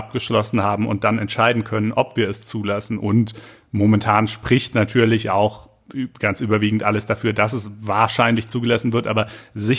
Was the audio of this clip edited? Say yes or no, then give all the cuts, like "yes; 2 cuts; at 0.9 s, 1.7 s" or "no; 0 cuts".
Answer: no; 0 cuts